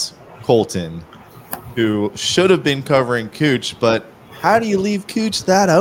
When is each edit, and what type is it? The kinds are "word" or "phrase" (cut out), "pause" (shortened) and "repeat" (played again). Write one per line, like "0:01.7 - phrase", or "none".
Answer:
none